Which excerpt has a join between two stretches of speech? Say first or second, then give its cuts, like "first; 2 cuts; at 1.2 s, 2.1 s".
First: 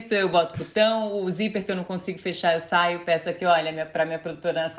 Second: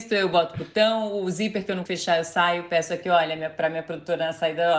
second; 1 cut; at 1.9 s